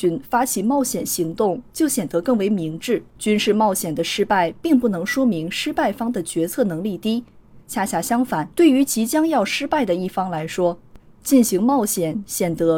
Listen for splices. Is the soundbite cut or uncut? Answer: cut